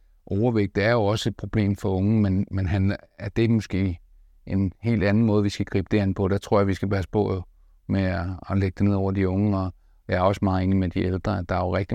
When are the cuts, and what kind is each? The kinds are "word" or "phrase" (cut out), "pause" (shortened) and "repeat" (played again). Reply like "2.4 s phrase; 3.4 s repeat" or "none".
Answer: none